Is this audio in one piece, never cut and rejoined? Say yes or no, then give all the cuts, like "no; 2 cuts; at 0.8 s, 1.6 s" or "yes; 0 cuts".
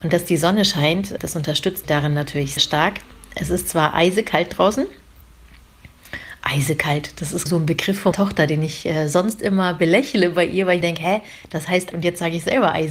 no; 7 cuts; at 1.2 s, 1.8 s, 2.6 s, 7.5 s, 8.1 s, 10.8 s, 11.9 s